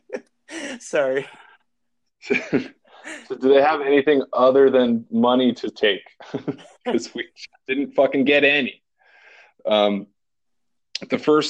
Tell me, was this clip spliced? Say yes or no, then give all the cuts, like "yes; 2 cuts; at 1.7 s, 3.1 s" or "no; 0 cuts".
no; 0 cuts